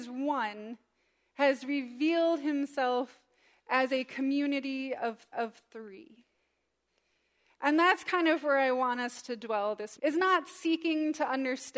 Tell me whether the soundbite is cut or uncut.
cut